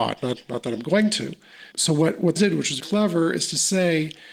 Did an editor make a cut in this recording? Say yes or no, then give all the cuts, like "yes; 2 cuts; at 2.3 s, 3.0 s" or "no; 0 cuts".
yes; 3 cuts; at 1.7 s, 2.4 s, 2.8 s